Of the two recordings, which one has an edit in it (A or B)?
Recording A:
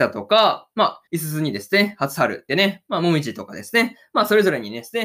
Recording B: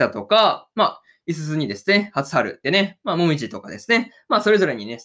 A